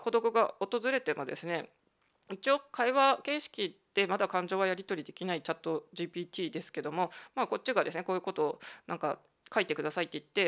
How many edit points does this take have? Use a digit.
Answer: 0